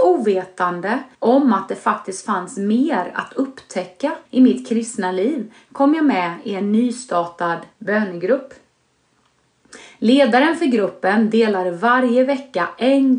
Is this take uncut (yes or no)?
no